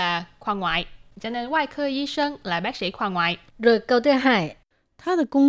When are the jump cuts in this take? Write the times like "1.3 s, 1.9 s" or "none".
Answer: 3.5 s